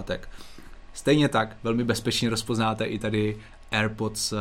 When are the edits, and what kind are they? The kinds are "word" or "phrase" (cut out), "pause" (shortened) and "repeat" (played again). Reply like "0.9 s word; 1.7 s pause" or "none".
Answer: none